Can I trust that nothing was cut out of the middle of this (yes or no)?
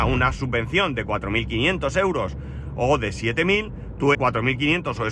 no